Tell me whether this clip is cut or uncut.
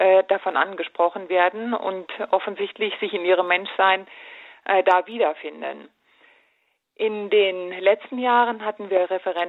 uncut